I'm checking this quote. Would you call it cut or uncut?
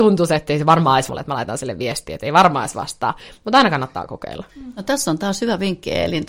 cut